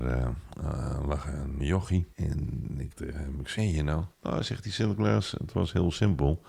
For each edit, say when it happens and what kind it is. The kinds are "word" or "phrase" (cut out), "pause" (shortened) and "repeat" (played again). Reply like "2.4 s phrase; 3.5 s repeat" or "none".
1.6 s word; 2.1 s pause; 2.9 s word; 3.6 s phrase; 4.1 s pause